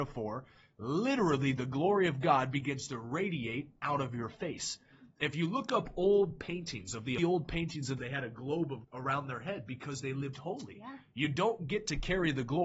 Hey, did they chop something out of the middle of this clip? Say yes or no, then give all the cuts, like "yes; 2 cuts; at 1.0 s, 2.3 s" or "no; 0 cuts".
yes; 3 cuts; at 7.2 s, 8.0 s, 8.8 s